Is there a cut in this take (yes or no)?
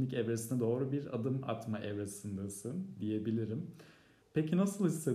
yes